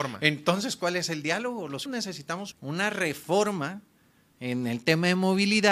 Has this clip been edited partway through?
yes; 2 cuts; at 1.9 s, 2.5 s

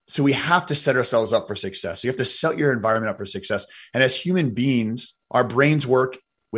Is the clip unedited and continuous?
no; 1 cut; at 5.2 s

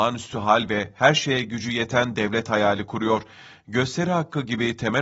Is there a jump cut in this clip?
no; 0 cuts

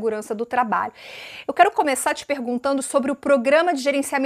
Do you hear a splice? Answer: no; 0 cuts

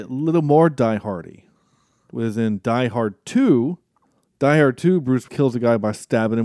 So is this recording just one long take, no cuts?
no; 1 cut; at 5.3 s

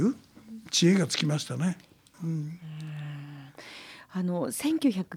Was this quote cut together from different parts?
no; 0 cuts

